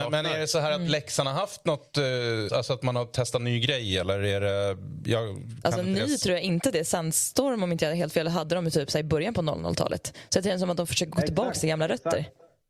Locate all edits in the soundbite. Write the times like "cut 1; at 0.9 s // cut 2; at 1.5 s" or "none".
cut 1; at 2.5 s